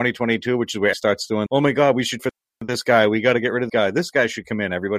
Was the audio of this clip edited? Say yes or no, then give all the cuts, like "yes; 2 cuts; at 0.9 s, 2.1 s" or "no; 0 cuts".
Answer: yes; 4 cuts; at 0.9 s, 1.5 s, 2.2 s, 3.7 s